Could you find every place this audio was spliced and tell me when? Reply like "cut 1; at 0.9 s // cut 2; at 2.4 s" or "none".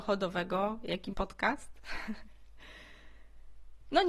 cut 1; at 1.1 s